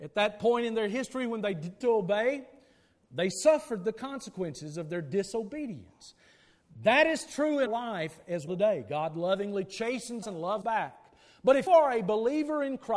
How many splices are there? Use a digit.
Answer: 6